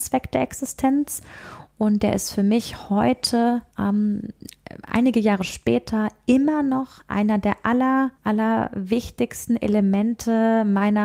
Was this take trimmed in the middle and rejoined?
yes; 2 cuts; at 3.7 s, 8.1 s

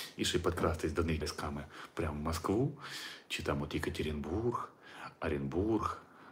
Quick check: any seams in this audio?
yes; 1 cut; at 1.2 s

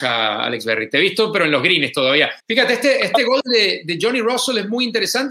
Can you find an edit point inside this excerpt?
yes; 1 cut; at 2.4 s

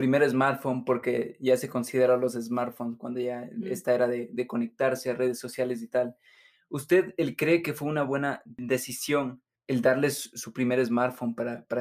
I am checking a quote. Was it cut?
no; 0 cuts

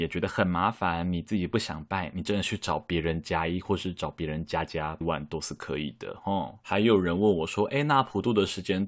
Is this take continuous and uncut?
no; 2 cuts; at 5.0 s, 6.6 s

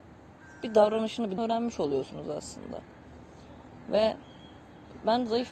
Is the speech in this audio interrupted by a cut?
yes; 1 cut; at 1.4 s

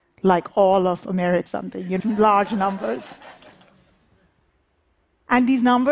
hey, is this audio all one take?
no; 2 cuts; at 1.5 s, 2.0 s

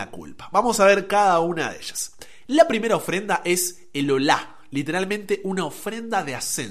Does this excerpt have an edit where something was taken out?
no; 0 cuts

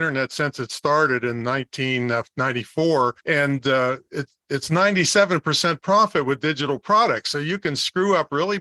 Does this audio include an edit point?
yes; 1 cut; at 3.2 s

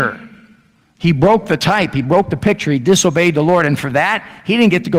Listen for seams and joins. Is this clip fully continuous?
yes; 0 cuts

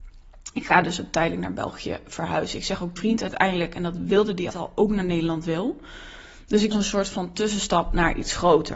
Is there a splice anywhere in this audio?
yes; 3 cuts; at 3.0 s, 4.5 s, 6.7 s

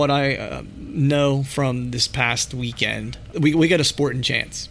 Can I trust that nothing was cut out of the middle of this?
no; 1 cut; at 3.3 s

